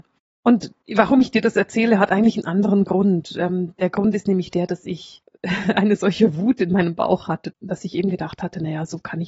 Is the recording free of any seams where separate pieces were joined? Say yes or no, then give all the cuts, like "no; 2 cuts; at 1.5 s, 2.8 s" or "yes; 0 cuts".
yes; 0 cuts